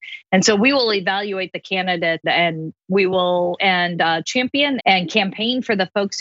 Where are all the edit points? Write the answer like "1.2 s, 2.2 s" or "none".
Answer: 2.2 s, 3.6 s, 4.8 s